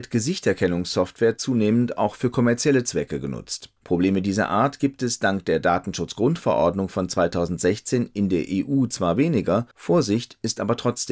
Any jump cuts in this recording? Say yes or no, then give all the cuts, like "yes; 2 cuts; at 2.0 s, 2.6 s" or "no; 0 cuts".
yes; 2 cuts; at 3.8 s, 9.7 s